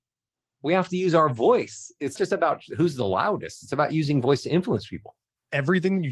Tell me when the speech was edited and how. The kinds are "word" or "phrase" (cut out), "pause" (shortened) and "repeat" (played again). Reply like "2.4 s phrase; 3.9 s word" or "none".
2.2 s word

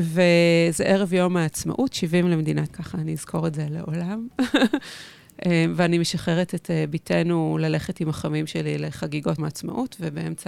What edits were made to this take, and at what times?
2.7 s word; 9.4 s word

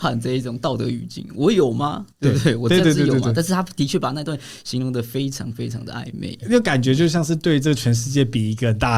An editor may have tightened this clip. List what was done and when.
2.1 s pause

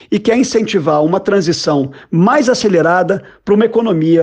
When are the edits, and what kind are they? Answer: none

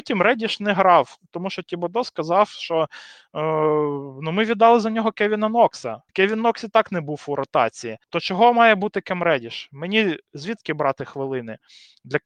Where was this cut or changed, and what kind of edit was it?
6.1 s pause; 8.0 s pause

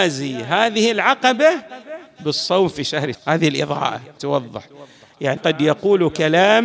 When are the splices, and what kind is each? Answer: 3.1 s word; 4.2 s word; 5.4 s word

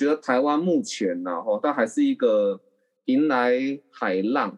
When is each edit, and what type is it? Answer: none

